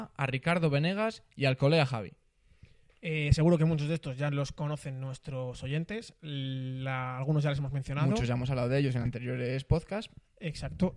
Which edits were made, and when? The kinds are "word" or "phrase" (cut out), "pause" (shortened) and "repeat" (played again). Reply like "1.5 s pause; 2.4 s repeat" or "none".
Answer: none